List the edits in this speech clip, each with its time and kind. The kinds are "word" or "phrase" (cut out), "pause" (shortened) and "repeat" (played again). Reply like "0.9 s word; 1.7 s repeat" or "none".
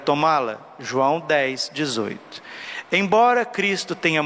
none